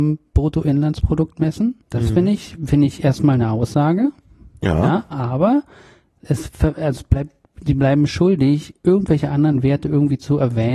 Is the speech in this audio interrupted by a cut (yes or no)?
yes